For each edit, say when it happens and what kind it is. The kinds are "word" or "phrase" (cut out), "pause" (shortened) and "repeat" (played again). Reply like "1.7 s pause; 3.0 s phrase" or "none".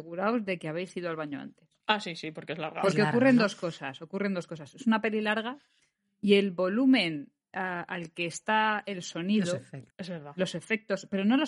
9.9 s pause